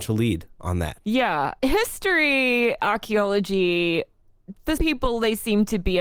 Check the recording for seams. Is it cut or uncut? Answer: cut